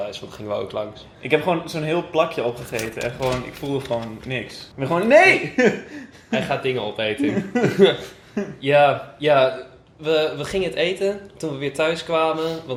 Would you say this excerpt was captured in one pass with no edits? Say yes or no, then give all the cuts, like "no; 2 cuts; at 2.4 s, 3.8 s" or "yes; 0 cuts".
yes; 0 cuts